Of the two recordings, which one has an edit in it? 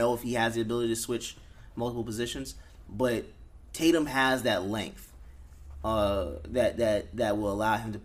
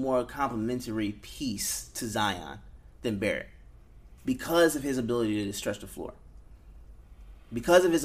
second; 2 cuts; at 2.9 s, 4.2 s

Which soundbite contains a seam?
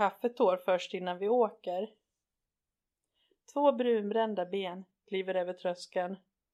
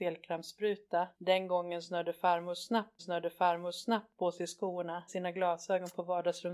second; 3 cuts; at 1.1 s, 3.0 s, 5.1 s

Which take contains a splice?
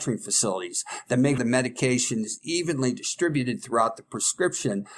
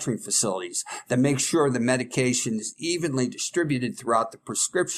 first; 1 cut; at 1.4 s

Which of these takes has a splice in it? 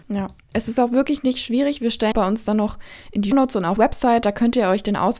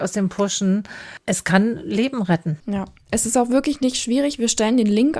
first; 3 cuts; at 2.1 s, 3.3 s, 3.8 s

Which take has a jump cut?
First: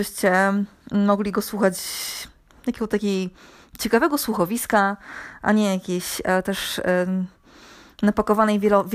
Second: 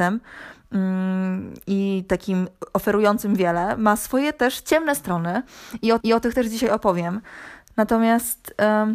second; 1 cut; at 6.0 s

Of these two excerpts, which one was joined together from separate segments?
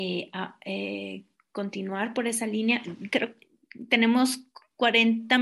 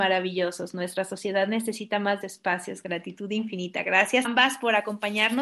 second; 2 cuts; at 2.2 s, 4.2 s

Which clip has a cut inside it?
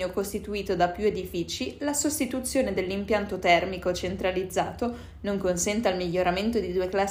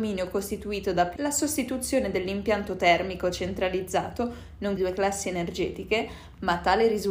second; 2 cuts; at 1.2 s, 4.8 s

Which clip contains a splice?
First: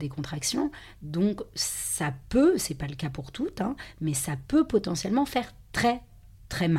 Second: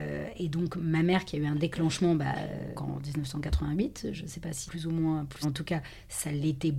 second; 3 cuts; at 2.7 s, 4.7 s, 5.4 s

